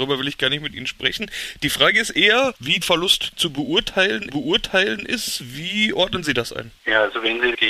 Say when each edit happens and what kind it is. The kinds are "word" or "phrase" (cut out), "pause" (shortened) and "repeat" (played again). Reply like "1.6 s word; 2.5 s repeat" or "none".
2.8 s word; 4.3 s repeat; 6.8 s pause